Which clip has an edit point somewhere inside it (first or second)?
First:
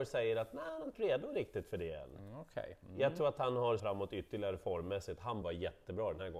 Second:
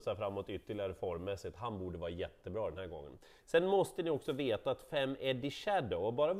first